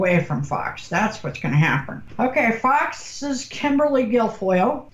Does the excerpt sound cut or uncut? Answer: uncut